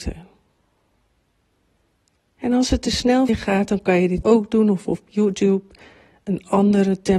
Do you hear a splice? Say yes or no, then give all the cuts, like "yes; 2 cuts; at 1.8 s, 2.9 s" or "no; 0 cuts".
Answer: yes; 2 cuts; at 3.3 s, 4.2 s